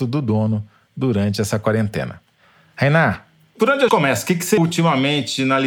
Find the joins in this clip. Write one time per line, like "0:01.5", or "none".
0:03.9
0:04.6